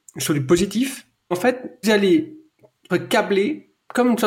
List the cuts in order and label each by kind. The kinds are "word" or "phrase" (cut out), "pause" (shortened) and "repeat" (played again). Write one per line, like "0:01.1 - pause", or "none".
0:01.3 - word
0:01.8 - word
0:02.9 - word

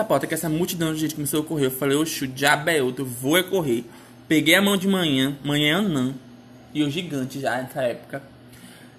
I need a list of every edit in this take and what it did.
none

